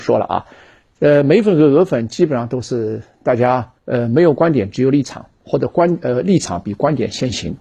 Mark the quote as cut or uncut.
cut